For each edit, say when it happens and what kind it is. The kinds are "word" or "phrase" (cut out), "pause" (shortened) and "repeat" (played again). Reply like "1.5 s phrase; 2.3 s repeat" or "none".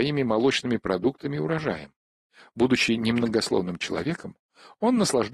none